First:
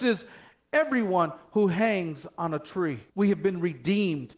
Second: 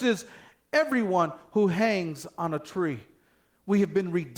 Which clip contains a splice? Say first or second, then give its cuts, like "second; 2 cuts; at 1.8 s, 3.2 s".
first; 1 cut; at 3.1 s